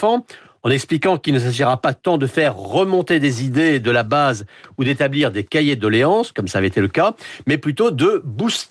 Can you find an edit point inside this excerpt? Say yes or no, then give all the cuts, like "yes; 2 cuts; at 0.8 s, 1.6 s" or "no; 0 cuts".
no; 0 cuts